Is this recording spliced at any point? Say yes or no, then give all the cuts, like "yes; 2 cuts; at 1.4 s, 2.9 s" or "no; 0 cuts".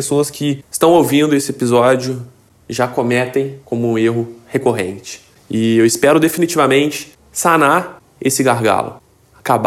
no; 0 cuts